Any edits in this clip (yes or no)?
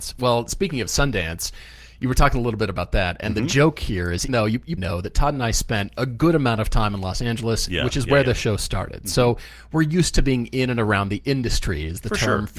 yes